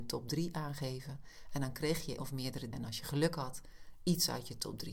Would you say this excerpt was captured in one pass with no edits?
no; 2 cuts; at 2.2 s, 2.7 s

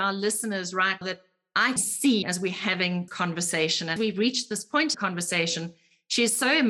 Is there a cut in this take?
yes; 6 cuts; at 1.0 s, 1.8 s, 2.2 s, 3.1 s, 4.0 s, 4.9 s

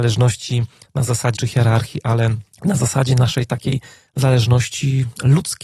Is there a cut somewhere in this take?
yes; 2 cuts; at 1.4 s, 2.5 s

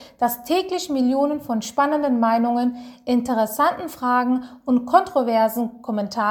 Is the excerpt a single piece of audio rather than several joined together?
yes; 0 cuts

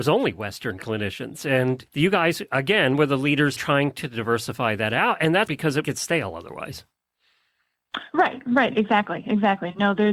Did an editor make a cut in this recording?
yes; 4 cuts; at 1.9 s, 3.6 s, 5.5 s, 5.8 s

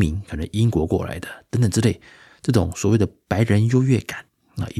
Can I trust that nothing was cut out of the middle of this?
yes; 0 cuts

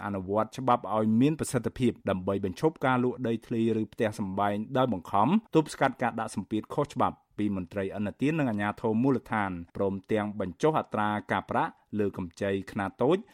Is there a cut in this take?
yes; 3 cuts; at 2.0 s, 5.5 s, 9.7 s

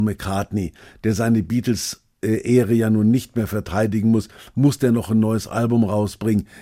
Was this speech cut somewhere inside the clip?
no; 0 cuts

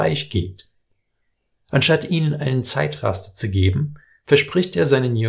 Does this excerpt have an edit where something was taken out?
no; 0 cuts

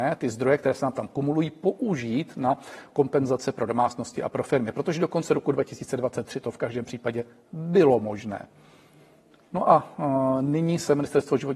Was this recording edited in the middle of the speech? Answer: no; 0 cuts

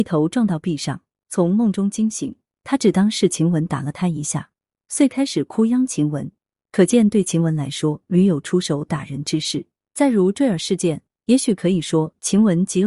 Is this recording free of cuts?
yes; 0 cuts

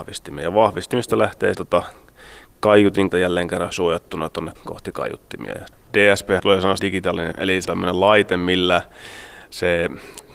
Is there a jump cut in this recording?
yes; 8 cuts; at 1.5 s, 3.1 s, 3.7 s, 4.6 s, 6.4 s, 6.8 s, 7.3 s, 7.6 s

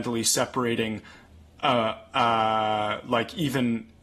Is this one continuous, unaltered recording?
yes; 0 cuts

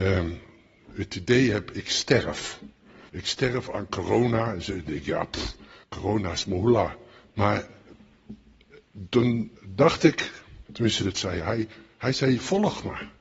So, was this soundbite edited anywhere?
yes; 4 cuts; at 3.1 s, 5.8 s, 9.6 s, 10.7 s

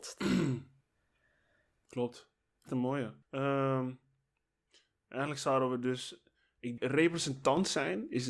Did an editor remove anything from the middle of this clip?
yes; 3 cuts; at 2.7 s, 3.2 s, 6.8 s

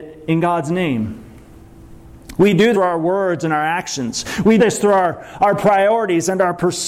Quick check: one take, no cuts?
no; 2 cuts; at 2.7 s, 4.6 s

